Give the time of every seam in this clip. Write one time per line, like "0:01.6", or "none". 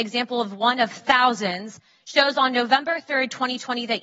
none